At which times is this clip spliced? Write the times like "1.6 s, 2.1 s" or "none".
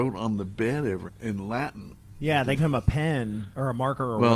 1.1 s, 2.6 s